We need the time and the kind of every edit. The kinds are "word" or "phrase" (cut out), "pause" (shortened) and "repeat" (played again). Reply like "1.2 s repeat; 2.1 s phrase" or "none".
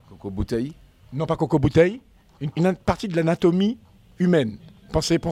2.5 s word